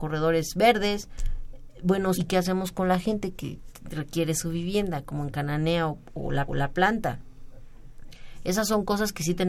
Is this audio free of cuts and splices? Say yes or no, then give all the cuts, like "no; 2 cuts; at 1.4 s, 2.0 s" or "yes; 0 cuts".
no; 2 cuts; at 2.1 s, 6.5 s